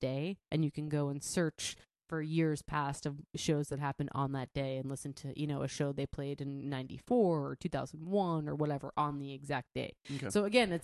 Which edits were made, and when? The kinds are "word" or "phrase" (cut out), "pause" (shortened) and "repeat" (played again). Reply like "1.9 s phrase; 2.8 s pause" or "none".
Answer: none